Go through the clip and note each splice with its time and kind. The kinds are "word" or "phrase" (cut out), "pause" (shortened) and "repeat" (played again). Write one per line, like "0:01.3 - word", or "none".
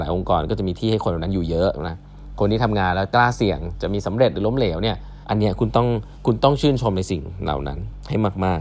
0:05.2 - pause
0:06.1 - pause